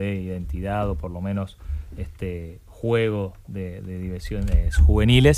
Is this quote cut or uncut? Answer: uncut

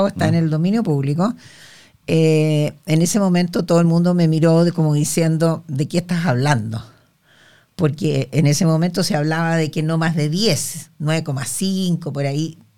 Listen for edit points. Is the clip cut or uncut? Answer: uncut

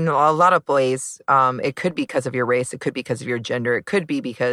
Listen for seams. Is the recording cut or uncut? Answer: uncut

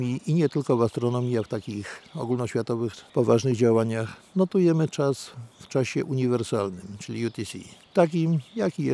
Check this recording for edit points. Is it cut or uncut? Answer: uncut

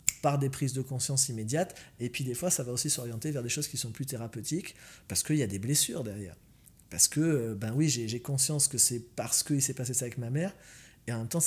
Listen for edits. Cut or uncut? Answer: uncut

